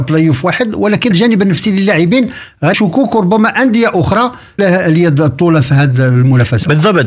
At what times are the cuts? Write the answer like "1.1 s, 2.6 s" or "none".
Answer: 1.1 s, 2.7 s, 4.6 s